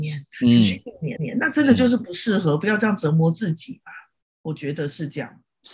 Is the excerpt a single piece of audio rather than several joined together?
no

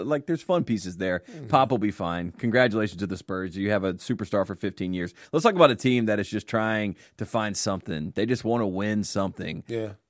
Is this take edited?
no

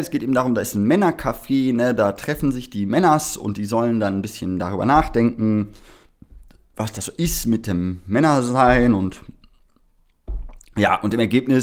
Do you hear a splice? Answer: no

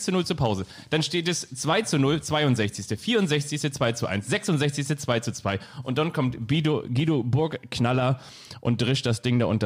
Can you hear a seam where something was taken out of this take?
no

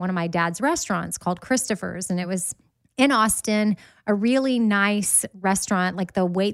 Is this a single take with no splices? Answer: yes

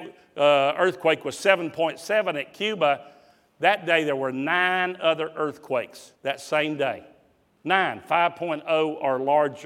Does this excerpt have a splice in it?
yes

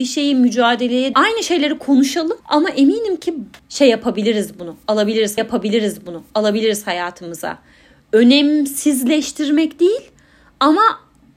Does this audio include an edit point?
yes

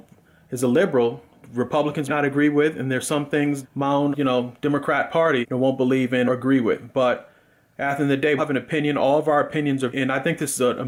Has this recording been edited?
yes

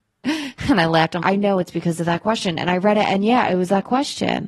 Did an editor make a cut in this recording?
yes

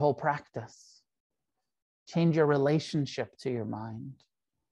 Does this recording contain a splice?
no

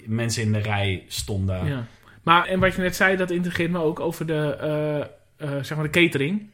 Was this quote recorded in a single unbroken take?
no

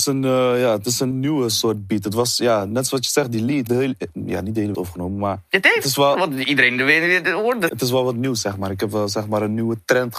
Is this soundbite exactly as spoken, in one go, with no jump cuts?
no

